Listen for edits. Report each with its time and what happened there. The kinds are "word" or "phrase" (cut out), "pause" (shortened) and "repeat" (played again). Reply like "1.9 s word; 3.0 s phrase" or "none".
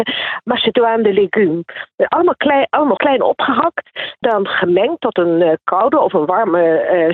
3.0 s word; 4.2 s word